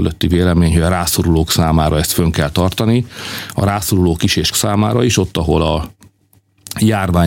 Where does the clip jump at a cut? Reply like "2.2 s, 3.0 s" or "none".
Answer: 4.5 s